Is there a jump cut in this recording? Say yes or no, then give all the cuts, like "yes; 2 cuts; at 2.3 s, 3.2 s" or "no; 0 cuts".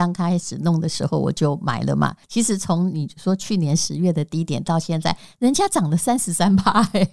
yes; 1 cut; at 2.2 s